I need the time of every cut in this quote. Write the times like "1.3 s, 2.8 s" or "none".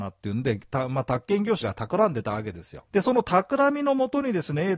1.6 s, 2.9 s